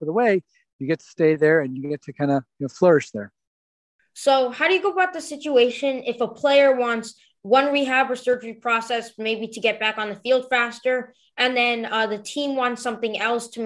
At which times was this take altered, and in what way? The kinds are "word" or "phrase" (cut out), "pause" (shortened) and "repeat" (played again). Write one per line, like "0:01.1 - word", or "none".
none